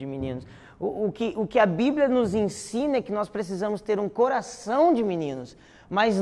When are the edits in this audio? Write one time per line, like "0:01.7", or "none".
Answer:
none